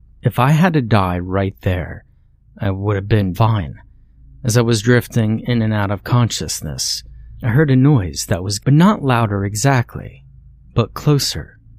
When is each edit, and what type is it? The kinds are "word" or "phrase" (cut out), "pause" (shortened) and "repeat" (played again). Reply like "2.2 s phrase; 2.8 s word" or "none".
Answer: 3.3 s word; 8.6 s phrase